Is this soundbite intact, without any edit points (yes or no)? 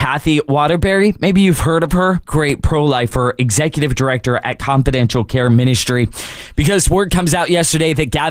no